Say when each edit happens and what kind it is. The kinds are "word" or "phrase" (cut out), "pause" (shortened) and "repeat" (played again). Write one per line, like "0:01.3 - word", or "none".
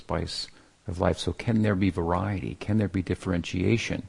none